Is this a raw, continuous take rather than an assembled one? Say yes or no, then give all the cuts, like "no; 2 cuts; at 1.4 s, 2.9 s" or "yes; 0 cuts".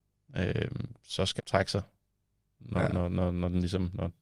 no; 1 cut; at 1.4 s